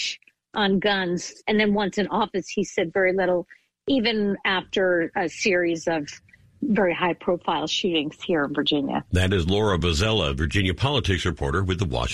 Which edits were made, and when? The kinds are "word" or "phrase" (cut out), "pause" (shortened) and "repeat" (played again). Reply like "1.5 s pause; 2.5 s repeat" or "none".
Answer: none